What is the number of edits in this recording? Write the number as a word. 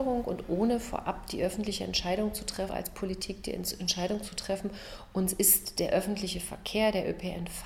one